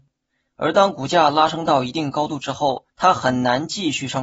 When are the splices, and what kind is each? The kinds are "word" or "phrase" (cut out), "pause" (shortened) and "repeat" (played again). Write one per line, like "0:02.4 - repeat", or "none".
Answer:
0:02.9 - pause